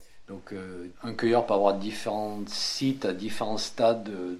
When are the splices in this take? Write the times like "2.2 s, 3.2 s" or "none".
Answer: 1.0 s